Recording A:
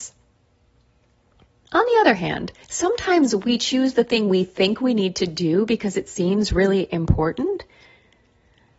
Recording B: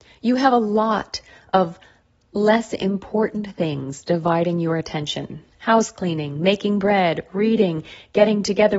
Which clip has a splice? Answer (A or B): A